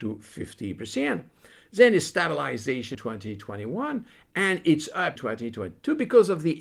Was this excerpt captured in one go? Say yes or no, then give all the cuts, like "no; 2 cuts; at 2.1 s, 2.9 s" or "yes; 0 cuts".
no; 2 cuts; at 2.9 s, 5.2 s